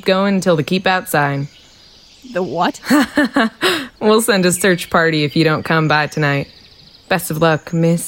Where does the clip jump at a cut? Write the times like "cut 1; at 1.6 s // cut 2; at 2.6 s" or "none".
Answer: none